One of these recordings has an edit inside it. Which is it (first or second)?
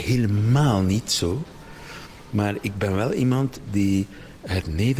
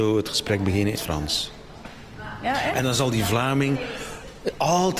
second